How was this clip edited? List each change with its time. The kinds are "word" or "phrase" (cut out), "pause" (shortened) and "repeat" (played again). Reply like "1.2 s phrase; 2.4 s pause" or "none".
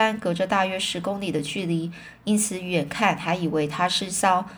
none